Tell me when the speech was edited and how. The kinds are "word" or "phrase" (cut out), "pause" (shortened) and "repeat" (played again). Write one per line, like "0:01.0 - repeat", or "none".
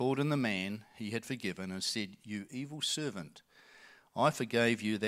none